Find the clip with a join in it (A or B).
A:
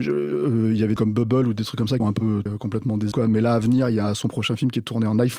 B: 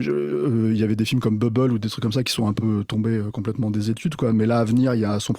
A